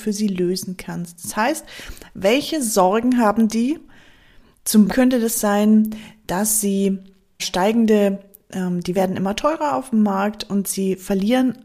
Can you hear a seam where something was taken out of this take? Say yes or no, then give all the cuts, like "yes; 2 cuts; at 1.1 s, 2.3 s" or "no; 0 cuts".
yes; 3 cuts; at 4.9 s, 7.4 s, 8.9 s